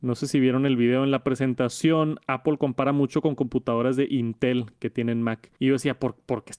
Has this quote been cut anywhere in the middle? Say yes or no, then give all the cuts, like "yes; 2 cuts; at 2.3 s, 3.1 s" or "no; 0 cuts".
yes; 1 cut; at 5.6 s